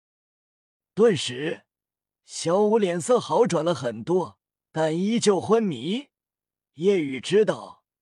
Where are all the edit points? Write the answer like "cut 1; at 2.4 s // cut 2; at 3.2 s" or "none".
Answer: cut 1; at 4.5 s